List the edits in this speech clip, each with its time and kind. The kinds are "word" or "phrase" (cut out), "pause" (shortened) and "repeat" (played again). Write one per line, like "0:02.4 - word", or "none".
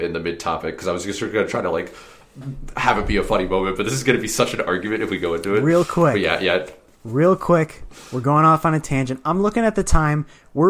none

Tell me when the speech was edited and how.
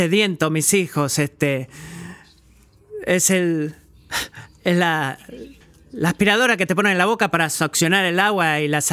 0:05.6 - pause

